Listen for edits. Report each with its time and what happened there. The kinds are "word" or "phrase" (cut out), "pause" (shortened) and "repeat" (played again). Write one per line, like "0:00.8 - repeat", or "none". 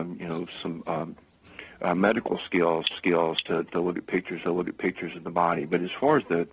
0:02.9 - repeat
0:04.4 - repeat